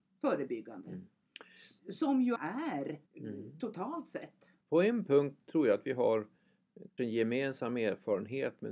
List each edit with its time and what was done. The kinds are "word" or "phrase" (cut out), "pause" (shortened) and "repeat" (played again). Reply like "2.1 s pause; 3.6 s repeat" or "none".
1.8 s pause; 2.4 s word; 3.1 s pause; 4.6 s pause; 5.4 s word; 7.0 s word